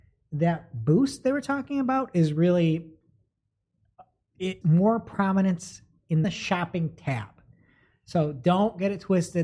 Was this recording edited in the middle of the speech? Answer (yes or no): yes